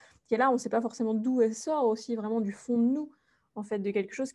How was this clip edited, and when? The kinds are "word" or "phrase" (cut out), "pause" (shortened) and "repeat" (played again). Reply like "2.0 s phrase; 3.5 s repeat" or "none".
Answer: none